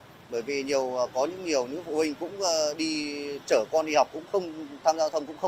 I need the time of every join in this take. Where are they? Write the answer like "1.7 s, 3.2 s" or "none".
3.4 s